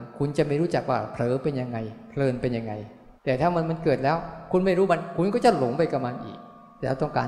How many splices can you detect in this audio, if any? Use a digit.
1